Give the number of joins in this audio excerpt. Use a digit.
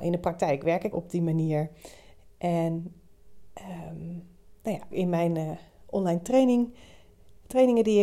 2